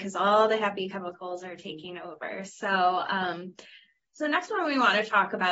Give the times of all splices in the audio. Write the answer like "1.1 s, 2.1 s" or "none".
none

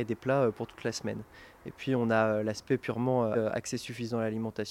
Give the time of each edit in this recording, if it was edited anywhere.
3.3 s

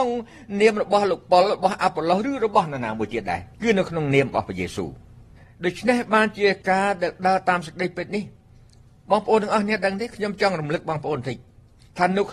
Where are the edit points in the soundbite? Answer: 3.5 s, 6.6 s

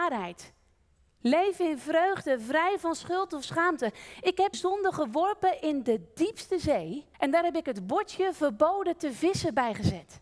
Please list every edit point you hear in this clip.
4.5 s, 7.1 s

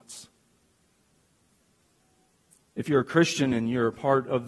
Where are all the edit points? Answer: none

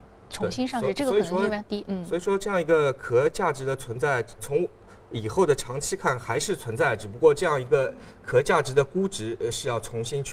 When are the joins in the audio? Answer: 4.4 s

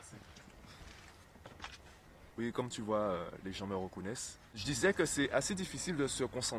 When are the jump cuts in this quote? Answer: 2.3 s

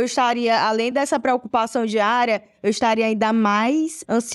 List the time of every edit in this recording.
none

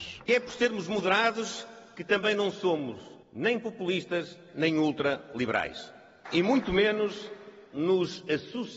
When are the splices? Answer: 3.2 s

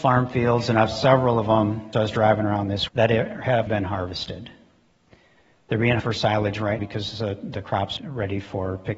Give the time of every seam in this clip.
0.9 s, 1.9 s, 2.9 s, 3.7 s, 6.0 s, 6.8 s, 8.0 s

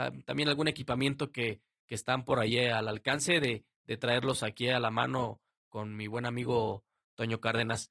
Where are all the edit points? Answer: none

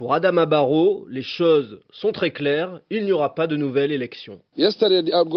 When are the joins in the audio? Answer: 4.5 s

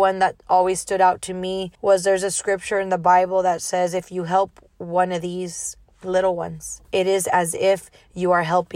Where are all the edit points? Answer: 1.7 s, 6.8 s

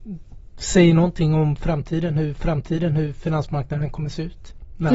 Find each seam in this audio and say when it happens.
2.3 s

